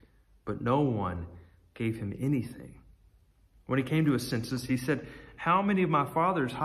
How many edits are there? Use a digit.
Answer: 0